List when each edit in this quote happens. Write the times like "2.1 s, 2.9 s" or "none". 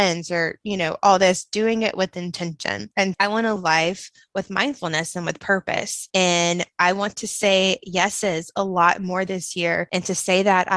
3.1 s, 3.6 s